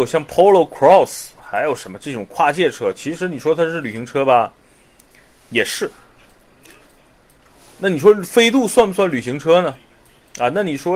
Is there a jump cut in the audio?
no; 0 cuts

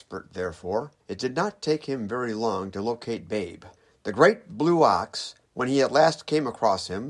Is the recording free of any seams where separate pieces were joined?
no; 3 cuts; at 1.0 s, 3.8 s, 5.5 s

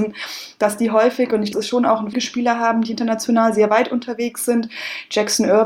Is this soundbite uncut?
no; 2 cuts; at 1.5 s, 2.1 s

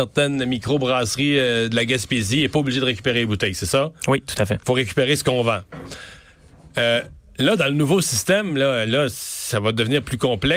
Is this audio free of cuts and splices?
yes; 0 cuts

